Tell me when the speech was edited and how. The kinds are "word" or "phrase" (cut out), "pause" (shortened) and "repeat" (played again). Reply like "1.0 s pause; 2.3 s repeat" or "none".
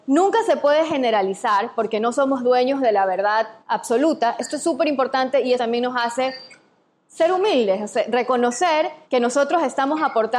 3.6 s pause; 5.6 s word; 9.0 s pause